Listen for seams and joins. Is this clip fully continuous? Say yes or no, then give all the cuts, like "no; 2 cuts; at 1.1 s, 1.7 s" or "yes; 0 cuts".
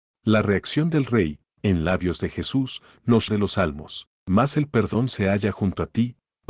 no; 2 cuts; at 3.3 s, 4.2 s